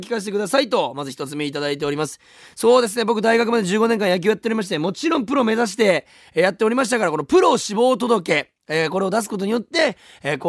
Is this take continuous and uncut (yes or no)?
yes